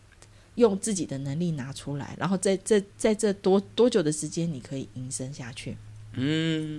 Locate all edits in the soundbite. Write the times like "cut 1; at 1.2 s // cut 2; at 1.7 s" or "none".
cut 1; at 2.9 s